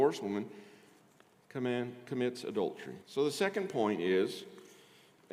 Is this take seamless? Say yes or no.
no